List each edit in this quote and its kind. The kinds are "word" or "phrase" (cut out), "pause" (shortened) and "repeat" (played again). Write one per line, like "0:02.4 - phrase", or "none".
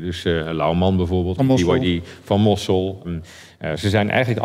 0:01.4 - word
0:03.0 - word